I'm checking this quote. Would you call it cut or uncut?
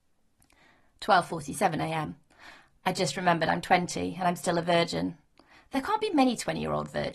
uncut